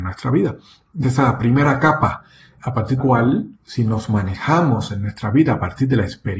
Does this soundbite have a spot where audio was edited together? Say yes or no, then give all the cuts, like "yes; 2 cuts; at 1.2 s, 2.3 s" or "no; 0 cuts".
yes; 4 cuts; at 1.0 s, 2.6 s, 3.0 s, 3.6 s